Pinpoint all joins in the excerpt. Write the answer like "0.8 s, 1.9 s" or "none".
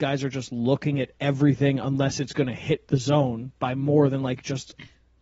none